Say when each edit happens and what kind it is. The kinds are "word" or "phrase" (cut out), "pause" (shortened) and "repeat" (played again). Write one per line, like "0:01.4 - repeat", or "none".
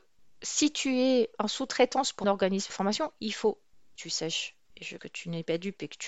0:01.3 - pause
0:02.2 - word
0:02.7 - word
0:04.0 - phrase
0:05.0 - word